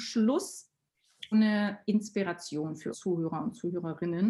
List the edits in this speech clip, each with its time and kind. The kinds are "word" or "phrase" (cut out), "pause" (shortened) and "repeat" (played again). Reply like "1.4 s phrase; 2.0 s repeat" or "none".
1.3 s word; 2.9 s word